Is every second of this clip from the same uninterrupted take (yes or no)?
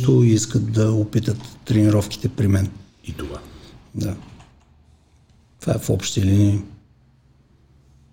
yes